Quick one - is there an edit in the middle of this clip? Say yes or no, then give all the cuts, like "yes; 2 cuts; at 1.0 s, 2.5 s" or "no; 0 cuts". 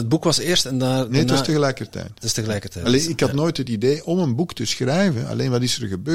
no; 0 cuts